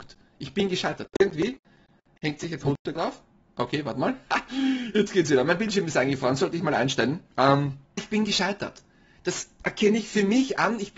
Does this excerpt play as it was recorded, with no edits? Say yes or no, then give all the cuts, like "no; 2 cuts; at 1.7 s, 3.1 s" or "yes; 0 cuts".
no; 2 cuts; at 2.6 s, 8.0 s